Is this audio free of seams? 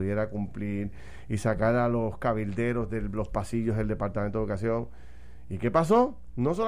yes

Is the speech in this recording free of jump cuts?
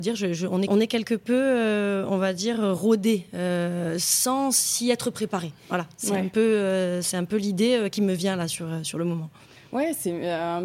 yes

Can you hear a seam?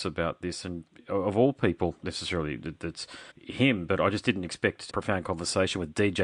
yes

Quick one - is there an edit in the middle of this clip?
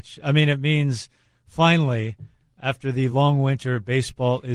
no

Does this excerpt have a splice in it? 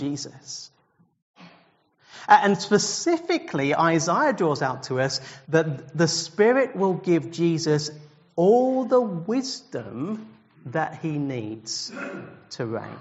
no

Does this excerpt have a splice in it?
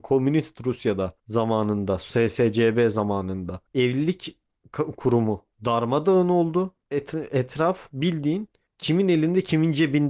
no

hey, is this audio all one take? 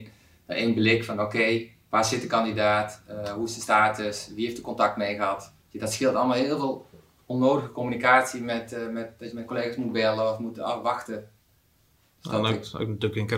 no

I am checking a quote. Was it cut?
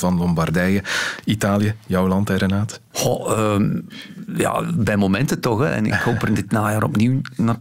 no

